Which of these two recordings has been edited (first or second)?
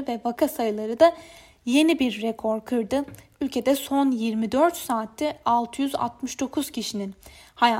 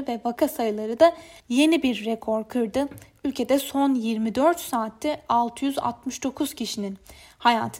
second